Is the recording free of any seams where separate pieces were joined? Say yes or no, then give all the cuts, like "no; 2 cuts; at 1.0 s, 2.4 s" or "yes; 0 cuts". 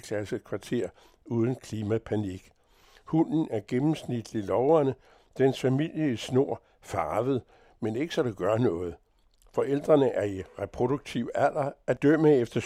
yes; 0 cuts